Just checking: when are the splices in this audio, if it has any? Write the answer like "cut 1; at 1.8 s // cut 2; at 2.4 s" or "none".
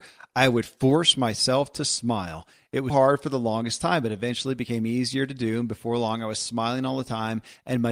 cut 1; at 2.9 s